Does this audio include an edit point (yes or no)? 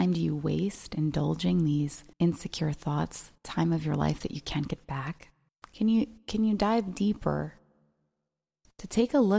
yes